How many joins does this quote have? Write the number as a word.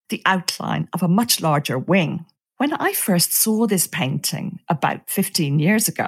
one